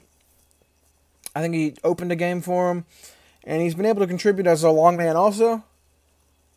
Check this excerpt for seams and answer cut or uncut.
uncut